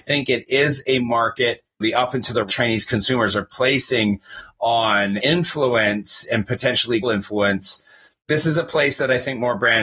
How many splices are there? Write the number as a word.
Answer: four